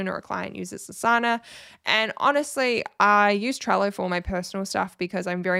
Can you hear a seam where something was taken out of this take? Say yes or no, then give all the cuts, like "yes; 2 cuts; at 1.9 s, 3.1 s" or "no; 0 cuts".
no; 0 cuts